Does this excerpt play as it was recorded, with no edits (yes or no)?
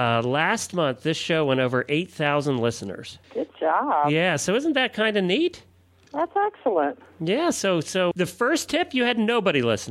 no